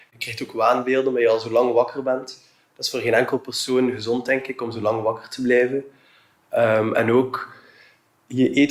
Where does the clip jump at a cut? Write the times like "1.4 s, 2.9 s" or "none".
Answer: none